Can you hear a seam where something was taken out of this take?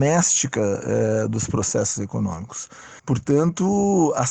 yes; 1 cut; at 3.0 s

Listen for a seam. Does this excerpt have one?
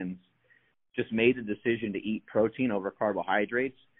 no; 0 cuts

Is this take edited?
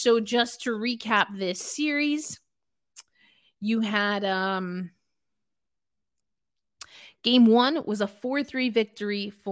no; 0 cuts

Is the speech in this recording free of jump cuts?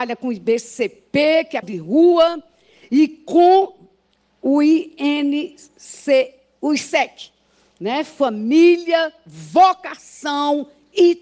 no; 1 cut; at 1.6 s

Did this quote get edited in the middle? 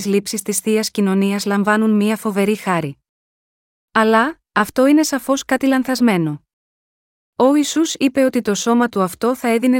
no; 0 cuts

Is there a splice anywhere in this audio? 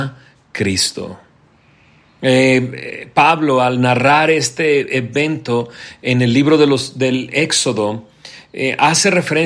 no; 0 cuts

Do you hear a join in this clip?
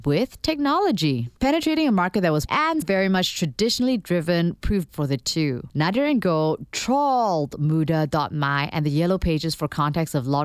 yes; 3 cuts; at 2.5 s, 2.8 s, 4.9 s

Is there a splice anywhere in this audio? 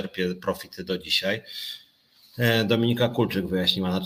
no; 0 cuts

